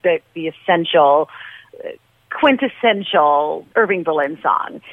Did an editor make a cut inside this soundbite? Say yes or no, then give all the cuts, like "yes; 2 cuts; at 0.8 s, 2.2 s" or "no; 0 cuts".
yes; 1 cut; at 3.7 s